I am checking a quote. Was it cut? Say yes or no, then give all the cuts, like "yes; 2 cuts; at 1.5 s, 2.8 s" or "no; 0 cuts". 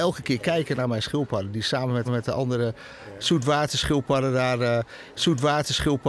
yes; 2 cuts; at 2.0 s, 5.1 s